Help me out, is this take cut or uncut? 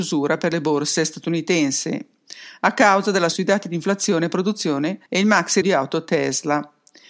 cut